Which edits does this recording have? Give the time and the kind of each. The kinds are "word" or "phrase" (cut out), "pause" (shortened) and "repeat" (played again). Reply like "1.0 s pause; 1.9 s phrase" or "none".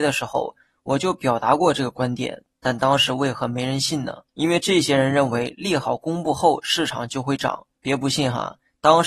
4.3 s pause; 7.7 s pause